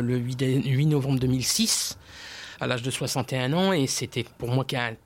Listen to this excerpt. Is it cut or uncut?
uncut